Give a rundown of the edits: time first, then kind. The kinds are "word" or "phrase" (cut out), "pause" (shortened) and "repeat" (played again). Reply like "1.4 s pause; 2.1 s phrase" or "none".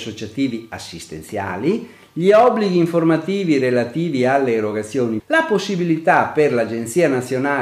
5.2 s word